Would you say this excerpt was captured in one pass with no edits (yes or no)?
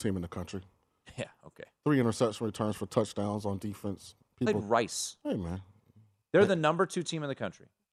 yes